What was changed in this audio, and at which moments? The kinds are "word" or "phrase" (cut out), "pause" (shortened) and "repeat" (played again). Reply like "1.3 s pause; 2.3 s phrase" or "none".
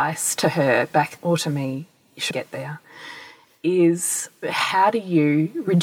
1.2 s word; 2.3 s word; 4.4 s word

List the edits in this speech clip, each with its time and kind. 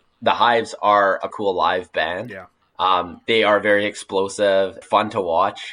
1.3 s word; 2.6 s pause; 4.8 s phrase

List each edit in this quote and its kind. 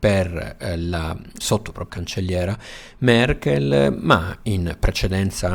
1.4 s word; 1.9 s word

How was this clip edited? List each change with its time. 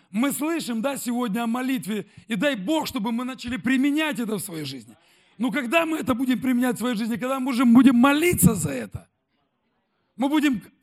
none

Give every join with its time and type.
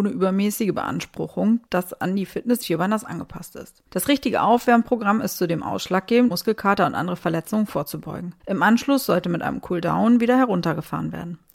1.7 s pause; 2.6 s word; 3.9 s pause; 6.3 s word; 8.4 s pause

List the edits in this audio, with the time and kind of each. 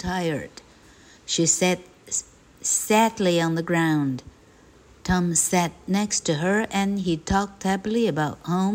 none

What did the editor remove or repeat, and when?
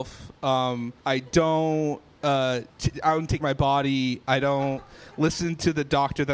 1.0 s pause; 2.7 s pause; 3.4 s word

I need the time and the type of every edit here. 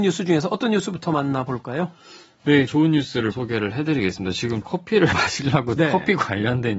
2.7 s word; 3.3 s word; 4.6 s word; 5.1 s word; 5.8 s word

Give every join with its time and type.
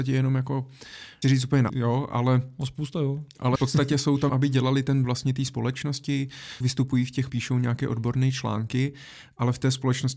1.2 s word; 1.7 s word; 3.5 s word; 4.3 s word; 5.0 s word; 6.6 s word; 7.3 s word

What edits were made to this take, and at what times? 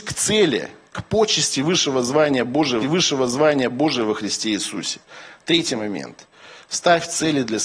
2.8 s repeat

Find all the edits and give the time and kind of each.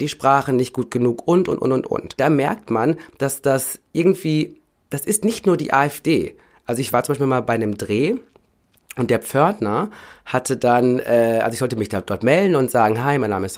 none

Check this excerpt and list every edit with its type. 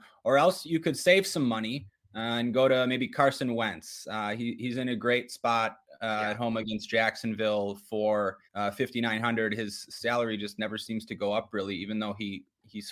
8.4 s pause

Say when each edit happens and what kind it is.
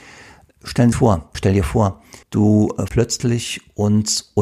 0.9 s phrase; 1.3 s word; 2.2 s pause; 2.9 s word

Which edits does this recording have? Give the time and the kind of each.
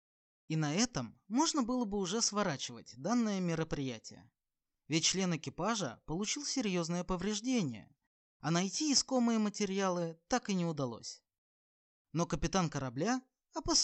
none

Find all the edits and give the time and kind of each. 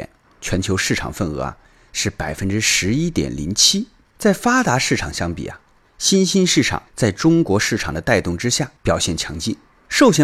6.9 s pause; 8.8 s pause

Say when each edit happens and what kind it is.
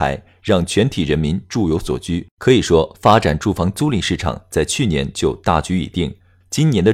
2.3 s pause

